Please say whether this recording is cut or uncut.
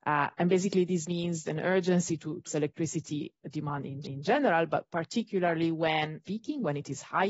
cut